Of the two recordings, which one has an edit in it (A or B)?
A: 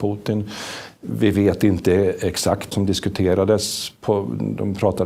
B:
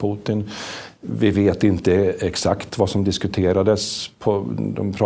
A